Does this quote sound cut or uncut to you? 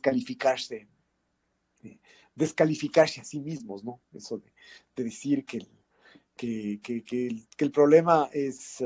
uncut